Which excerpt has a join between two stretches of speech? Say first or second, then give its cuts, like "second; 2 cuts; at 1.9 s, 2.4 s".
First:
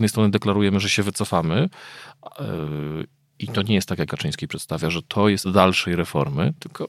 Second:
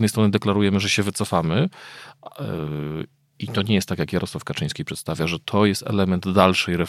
first; 2 cuts; at 4.1 s, 5.4 s